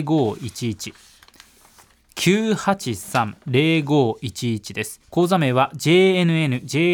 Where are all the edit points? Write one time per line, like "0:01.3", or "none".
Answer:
0:03.4
0:05.0